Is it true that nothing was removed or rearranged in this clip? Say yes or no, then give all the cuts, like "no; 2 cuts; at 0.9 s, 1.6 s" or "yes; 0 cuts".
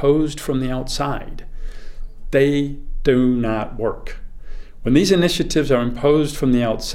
yes; 0 cuts